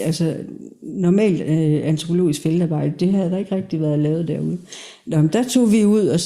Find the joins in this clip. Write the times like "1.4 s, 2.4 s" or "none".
none

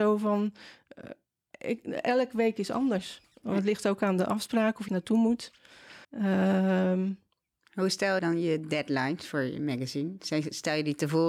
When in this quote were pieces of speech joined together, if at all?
4.9 s, 6.0 s, 8.2 s

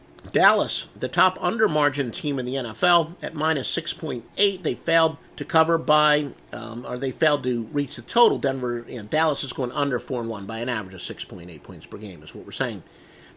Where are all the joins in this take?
5.3 s

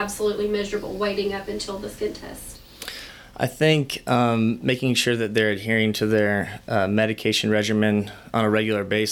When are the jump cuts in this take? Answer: none

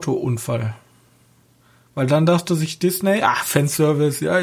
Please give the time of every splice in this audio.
none

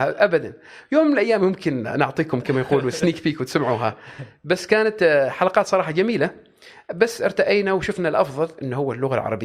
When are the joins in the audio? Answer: none

